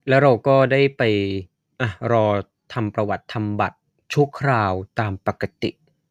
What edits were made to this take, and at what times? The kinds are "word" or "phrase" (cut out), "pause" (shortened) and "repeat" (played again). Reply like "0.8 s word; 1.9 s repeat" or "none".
none